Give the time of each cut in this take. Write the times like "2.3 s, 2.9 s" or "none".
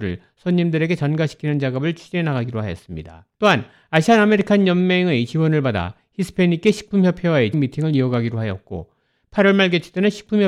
3.3 s, 7.5 s